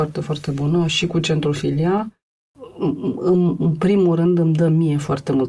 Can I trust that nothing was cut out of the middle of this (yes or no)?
yes